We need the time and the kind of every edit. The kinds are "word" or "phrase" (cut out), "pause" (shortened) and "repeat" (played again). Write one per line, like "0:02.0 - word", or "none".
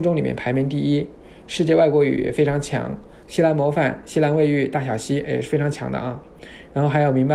none

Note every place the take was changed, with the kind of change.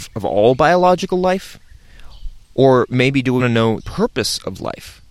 0:02.4 - pause
0:03.4 - word
0:03.8 - word

